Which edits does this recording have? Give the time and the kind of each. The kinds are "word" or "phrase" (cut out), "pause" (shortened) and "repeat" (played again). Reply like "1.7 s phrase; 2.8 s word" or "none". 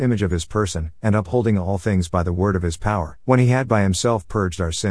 1.0 s pause; 3.2 s pause